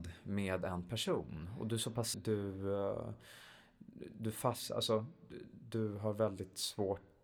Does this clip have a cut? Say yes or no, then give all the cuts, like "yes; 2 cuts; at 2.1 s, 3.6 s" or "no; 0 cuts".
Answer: yes; 1 cut; at 2.1 s